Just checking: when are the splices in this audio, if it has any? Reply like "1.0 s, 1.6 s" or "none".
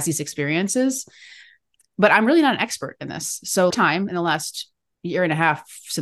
3.7 s